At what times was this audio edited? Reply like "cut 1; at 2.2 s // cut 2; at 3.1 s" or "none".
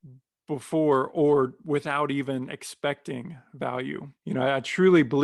cut 1; at 4.2 s